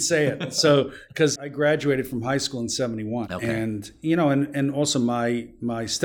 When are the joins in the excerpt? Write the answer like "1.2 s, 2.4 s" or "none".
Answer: 1.4 s